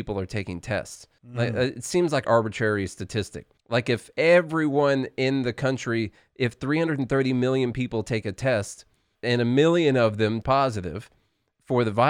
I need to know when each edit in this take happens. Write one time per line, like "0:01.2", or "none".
0:01.2
0:02.2
0:03.6
0:09.2
0:10.4